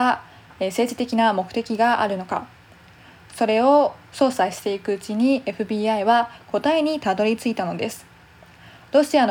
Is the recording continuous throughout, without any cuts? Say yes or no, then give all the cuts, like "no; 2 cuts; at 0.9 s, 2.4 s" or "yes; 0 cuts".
yes; 0 cuts